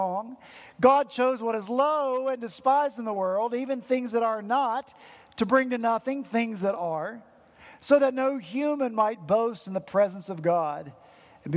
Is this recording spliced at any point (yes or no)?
no